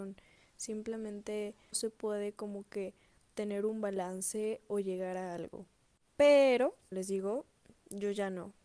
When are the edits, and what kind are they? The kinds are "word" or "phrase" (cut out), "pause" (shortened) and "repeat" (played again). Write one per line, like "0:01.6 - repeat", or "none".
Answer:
0:01.7 - word
0:06.9 - word
0:07.8 - word